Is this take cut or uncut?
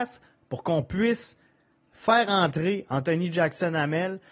uncut